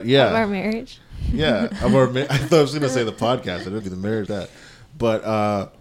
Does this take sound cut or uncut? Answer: cut